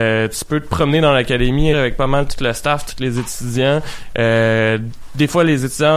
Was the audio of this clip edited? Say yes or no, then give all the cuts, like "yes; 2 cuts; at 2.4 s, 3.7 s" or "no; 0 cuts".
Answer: yes; 1 cut; at 1.7 s